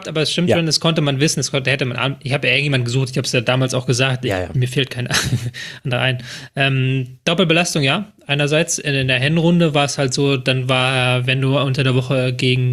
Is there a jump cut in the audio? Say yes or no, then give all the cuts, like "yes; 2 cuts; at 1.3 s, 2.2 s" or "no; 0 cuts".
no; 0 cuts